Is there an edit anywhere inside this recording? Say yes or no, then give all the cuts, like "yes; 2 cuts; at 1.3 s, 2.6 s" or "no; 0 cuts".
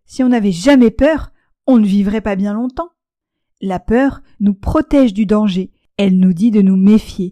no; 0 cuts